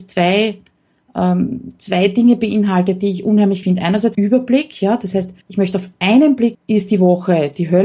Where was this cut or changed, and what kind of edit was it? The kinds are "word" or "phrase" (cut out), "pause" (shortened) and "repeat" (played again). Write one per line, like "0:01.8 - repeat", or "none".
0:03.6 - word
0:04.1 - phrase
0:05.4 - pause
0:06.5 - word